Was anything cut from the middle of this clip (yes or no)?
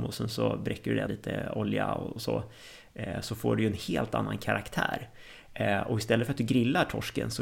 yes